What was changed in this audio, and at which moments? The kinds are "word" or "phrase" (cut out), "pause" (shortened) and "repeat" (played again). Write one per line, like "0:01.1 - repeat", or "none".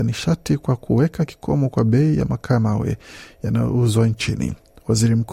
none